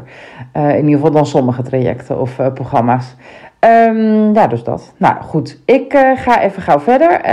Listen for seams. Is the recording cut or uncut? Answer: uncut